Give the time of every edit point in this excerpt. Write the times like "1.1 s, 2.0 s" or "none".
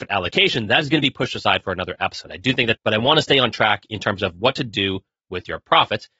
2.8 s